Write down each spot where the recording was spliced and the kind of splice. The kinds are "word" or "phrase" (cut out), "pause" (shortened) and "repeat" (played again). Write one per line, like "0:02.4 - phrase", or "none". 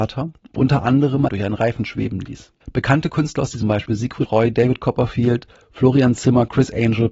0:01.3 - phrase
0:02.6 - pause
0:03.6 - phrase
0:04.2 - word